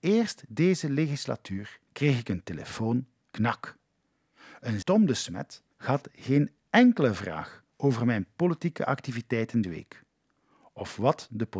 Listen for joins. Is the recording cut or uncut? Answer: cut